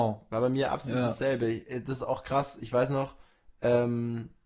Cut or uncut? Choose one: uncut